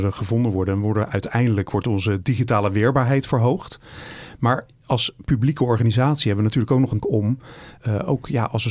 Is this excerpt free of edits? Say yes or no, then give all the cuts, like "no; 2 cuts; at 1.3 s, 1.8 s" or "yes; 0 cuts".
no; 2 cuts; at 7.0 s, 7.8 s